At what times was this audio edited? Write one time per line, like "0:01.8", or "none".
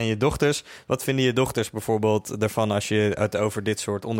none